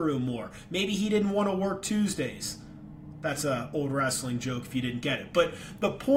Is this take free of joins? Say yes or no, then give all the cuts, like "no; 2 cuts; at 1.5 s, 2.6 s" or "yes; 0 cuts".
yes; 0 cuts